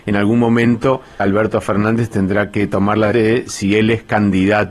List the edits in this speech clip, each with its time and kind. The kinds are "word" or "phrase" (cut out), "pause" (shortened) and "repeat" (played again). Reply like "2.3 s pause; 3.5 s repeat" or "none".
1.2 s word; 3.1 s word